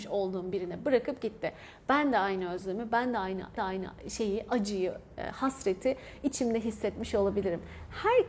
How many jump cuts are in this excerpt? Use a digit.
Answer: 1